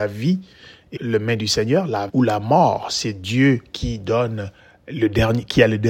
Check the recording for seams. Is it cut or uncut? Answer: cut